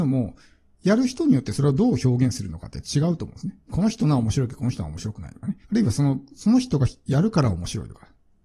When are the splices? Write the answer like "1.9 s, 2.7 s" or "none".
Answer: 3.7 s, 5.6 s

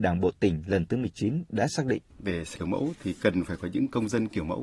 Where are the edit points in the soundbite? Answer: 2.1 s, 2.6 s

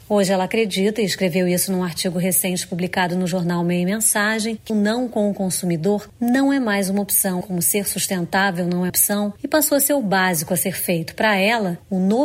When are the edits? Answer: 4.7 s, 7.4 s, 8.9 s

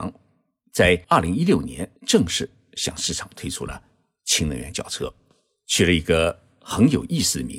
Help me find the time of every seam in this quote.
1.0 s, 2.0 s

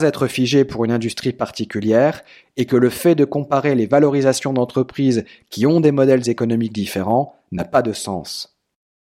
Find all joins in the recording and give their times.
none

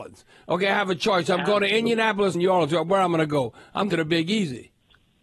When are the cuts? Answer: 2.3 s, 3.9 s

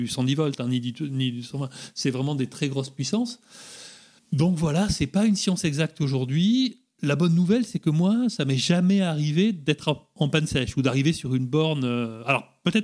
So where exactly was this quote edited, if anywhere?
4.2 s

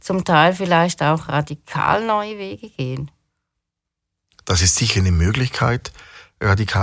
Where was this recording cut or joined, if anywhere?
none

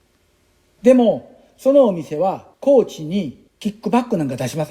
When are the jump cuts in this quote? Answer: 2.5 s, 3.5 s

